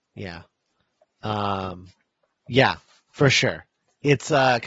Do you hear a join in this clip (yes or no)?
no